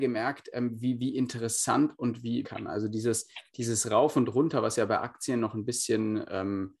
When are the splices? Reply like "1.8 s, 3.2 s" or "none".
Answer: 2.4 s